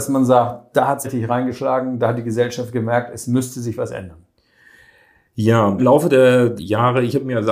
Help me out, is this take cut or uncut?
cut